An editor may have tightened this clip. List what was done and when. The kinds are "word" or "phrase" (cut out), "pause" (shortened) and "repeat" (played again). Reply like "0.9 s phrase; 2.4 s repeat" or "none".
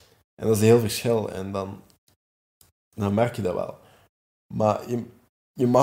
none